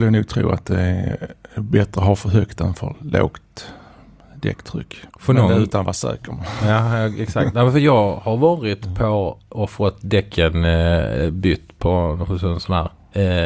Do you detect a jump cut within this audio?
yes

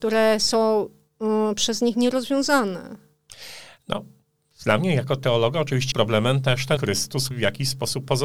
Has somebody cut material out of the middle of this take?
yes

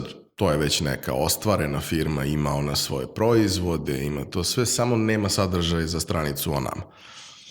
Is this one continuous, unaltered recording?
yes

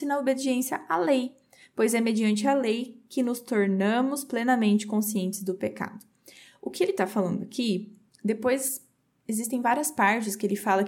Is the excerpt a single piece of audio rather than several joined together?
yes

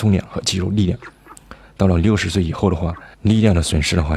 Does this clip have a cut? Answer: yes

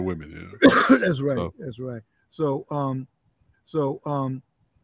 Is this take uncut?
no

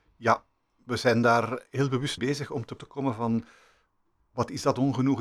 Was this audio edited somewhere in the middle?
yes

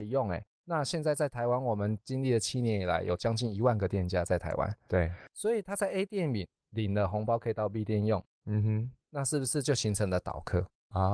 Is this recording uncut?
yes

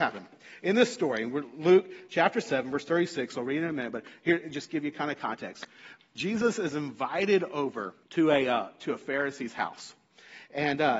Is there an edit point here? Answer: yes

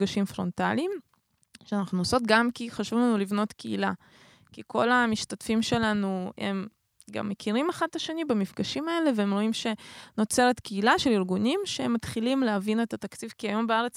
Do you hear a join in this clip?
no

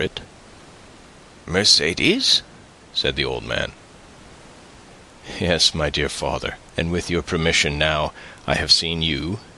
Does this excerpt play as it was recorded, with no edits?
no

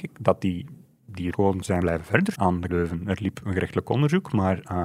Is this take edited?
yes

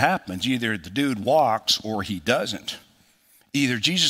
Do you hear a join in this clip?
no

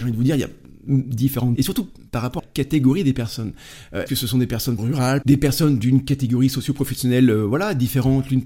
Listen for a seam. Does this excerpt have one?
yes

